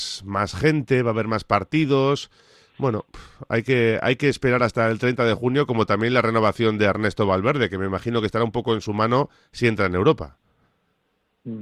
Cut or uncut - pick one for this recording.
uncut